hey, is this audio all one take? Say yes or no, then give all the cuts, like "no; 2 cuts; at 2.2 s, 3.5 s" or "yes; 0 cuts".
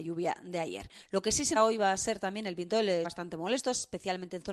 no; 2 cuts; at 1.6 s, 3.0 s